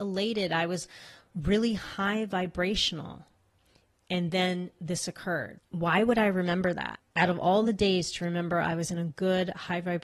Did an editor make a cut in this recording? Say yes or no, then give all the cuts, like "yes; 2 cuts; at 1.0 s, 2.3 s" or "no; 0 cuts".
no; 0 cuts